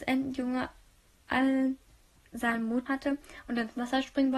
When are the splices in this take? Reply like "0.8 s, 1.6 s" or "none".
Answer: 2.9 s